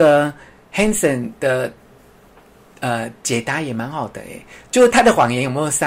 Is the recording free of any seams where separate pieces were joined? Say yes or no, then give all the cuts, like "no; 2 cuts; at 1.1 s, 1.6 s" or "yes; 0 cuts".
yes; 0 cuts